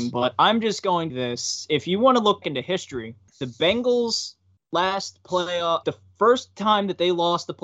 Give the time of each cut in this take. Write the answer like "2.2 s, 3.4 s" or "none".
1.1 s, 2.4 s, 3.3 s, 4.6 s, 5.8 s